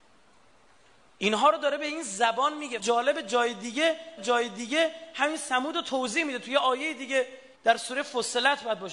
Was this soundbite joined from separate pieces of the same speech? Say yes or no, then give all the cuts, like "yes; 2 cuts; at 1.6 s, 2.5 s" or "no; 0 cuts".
yes; 3 cuts; at 2.8 s, 4.2 s, 7.5 s